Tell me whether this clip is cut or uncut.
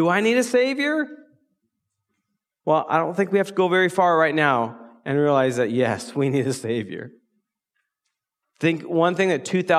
uncut